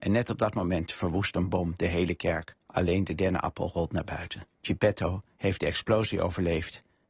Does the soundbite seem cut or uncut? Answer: cut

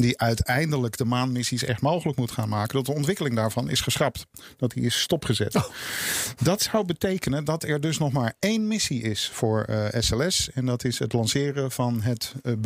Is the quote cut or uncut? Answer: uncut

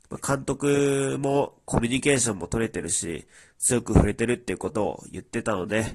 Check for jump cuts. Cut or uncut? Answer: uncut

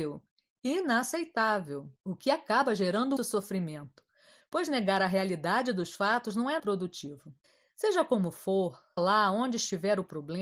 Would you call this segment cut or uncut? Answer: cut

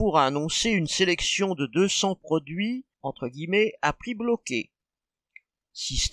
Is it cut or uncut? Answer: cut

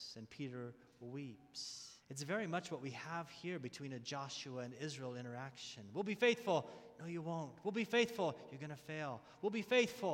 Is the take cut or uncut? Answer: cut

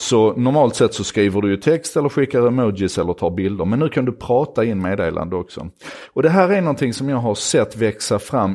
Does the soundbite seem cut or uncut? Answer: uncut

